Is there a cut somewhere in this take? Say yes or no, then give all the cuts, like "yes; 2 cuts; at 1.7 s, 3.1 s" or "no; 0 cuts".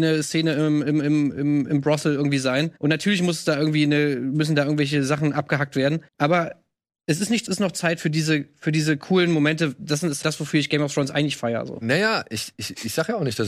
yes; 4 cuts; at 2.8 s, 6.1 s, 7.5 s, 10.2 s